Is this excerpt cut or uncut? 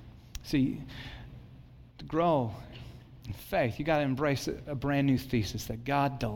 uncut